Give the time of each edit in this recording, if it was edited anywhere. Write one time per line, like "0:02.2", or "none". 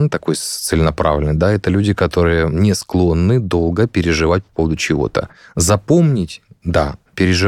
none